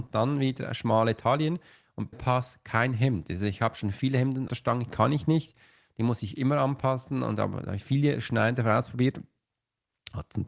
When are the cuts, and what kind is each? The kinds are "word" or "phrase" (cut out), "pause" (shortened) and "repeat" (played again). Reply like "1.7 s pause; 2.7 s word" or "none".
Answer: 2.1 s word; 4.5 s word; 7.8 s word